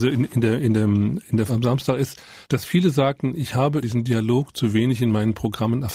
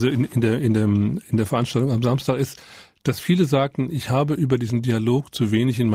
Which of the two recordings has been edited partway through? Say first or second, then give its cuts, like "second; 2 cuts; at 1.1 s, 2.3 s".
first; 3 cuts; at 1.5 s, 2.4 s, 3.8 s